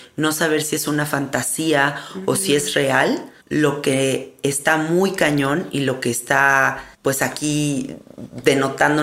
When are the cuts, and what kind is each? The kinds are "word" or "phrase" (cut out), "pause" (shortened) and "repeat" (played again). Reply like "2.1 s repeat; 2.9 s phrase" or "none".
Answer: 3.4 s pause; 6.9 s pause